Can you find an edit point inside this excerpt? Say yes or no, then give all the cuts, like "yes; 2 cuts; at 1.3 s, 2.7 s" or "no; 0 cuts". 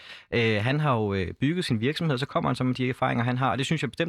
no; 0 cuts